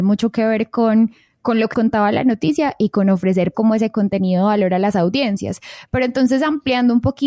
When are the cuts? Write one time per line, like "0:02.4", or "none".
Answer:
0:01.7
0:03.5